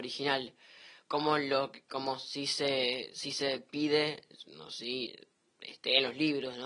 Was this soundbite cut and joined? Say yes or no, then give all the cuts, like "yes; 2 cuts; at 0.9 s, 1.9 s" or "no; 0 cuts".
no; 0 cuts